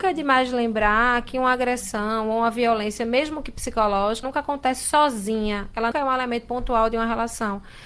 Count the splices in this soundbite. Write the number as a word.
two